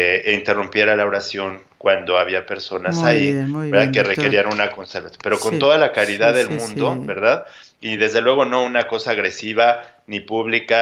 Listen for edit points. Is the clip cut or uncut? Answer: uncut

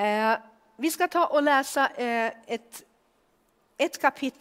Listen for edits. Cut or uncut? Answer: uncut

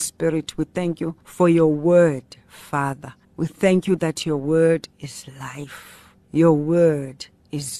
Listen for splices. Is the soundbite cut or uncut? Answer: cut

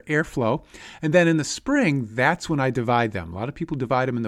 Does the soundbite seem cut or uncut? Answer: uncut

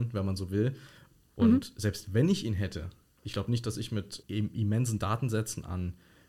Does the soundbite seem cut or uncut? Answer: uncut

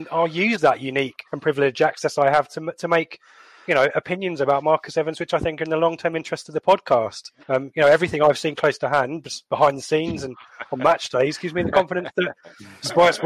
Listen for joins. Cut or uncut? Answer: cut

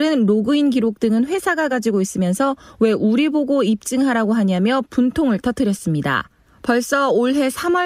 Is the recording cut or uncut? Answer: uncut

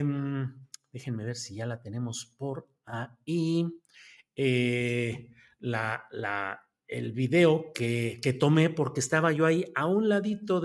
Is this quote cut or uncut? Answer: uncut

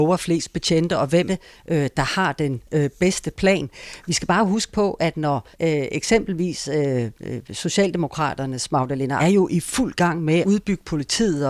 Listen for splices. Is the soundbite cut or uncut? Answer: cut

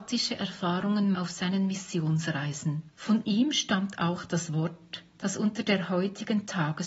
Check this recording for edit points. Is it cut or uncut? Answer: cut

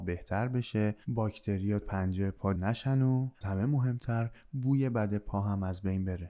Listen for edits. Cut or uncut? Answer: cut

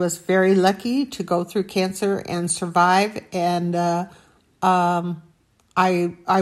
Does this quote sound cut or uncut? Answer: uncut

